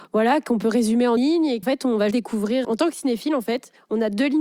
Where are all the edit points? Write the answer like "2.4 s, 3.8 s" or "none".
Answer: 1.2 s, 1.6 s, 2.1 s, 2.6 s

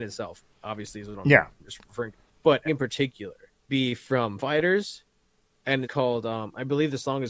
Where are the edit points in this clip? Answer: 2.7 s, 3.7 s, 4.4 s, 5.8 s

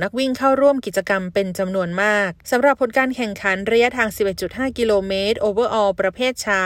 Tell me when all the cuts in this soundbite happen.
2.4 s

